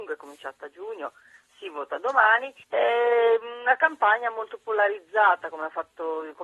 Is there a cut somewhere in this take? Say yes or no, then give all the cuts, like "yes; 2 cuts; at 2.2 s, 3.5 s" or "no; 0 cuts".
yes; 1 cut; at 2.6 s